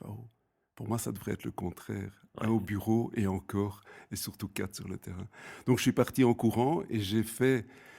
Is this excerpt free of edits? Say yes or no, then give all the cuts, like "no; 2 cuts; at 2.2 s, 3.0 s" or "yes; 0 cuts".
yes; 0 cuts